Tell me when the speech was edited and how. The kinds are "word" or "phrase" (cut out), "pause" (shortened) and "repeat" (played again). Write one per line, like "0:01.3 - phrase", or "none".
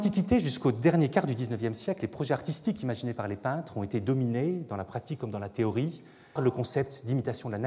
0:06.4 - word